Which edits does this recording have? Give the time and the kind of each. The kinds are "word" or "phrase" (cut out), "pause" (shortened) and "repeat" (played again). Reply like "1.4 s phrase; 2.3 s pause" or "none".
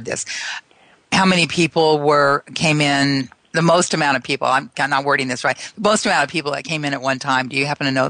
3.4 s pause